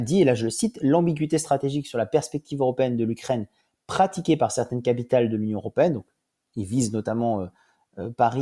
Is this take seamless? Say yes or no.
yes